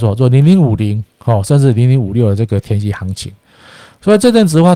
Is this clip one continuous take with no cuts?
yes; 0 cuts

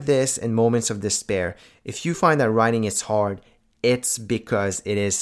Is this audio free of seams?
yes; 0 cuts

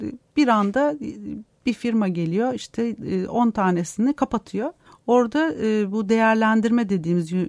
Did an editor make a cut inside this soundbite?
yes; 1 cut; at 4.9 s

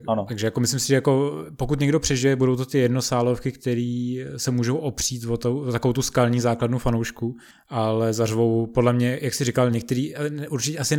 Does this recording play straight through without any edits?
yes; 0 cuts

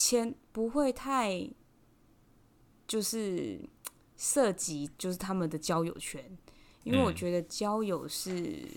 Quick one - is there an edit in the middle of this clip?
no; 0 cuts

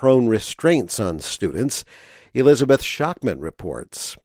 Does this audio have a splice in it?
no; 0 cuts

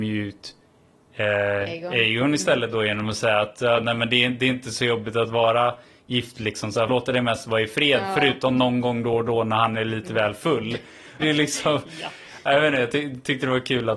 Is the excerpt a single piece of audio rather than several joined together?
no; 2 cuts; at 6.9 s, 11.2 s

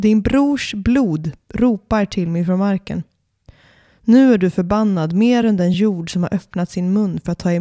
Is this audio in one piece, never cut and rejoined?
yes; 0 cuts

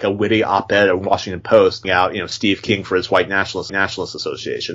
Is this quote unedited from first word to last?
no; 2 cuts; at 1.8 s, 3.7 s

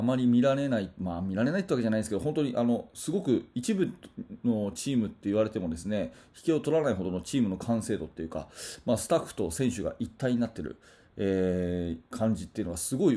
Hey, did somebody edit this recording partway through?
yes; 1 cut; at 12.0 s

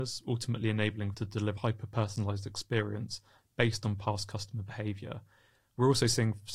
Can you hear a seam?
yes; 2 cuts; at 1.1 s, 1.6 s

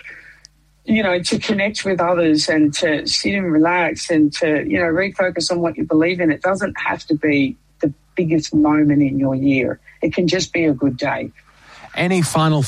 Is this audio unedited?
yes; 0 cuts

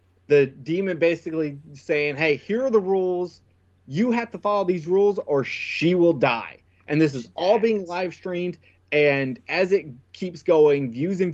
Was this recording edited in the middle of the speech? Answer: no; 0 cuts

